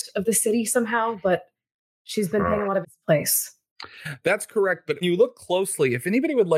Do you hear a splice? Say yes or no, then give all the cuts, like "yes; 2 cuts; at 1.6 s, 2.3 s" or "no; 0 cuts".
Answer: yes; 2 cuts; at 2.8 s, 5.0 s